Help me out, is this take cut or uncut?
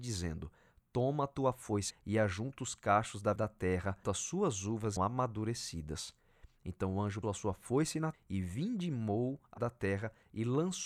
cut